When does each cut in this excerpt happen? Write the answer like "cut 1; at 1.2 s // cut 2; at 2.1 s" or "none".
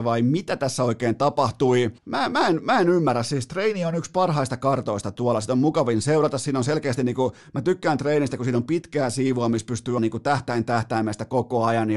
cut 1; at 2.0 s // cut 2; at 10.0 s

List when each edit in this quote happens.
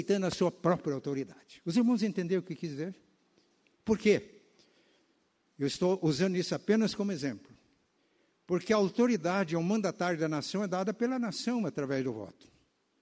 none

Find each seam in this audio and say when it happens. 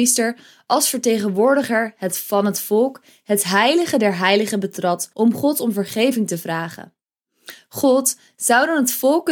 cut 1; at 5.1 s

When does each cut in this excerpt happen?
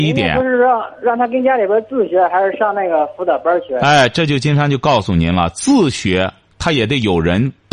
none

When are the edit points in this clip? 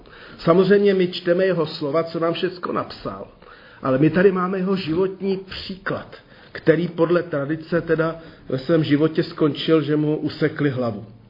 none

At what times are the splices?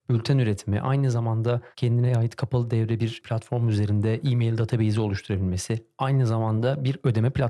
cut 1; at 1.7 s

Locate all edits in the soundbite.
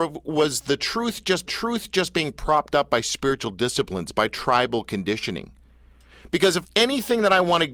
cut 1; at 1.5 s // cut 2; at 6.6 s

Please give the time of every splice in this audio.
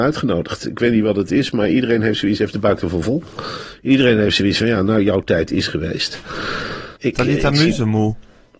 cut 1; at 7.0 s

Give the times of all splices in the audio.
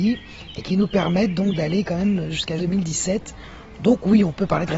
cut 1; at 2.6 s

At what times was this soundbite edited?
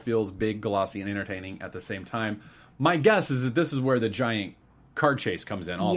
none

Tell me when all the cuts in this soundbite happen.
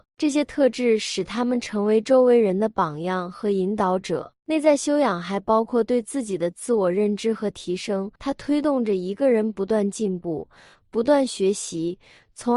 cut 1; at 8.2 s

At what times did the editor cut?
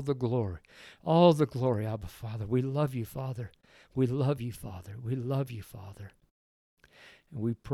none

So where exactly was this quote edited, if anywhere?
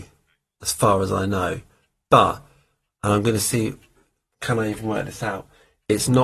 none

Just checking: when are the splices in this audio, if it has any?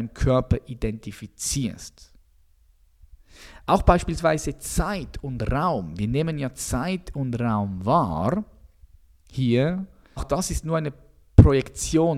cut 1; at 10.2 s

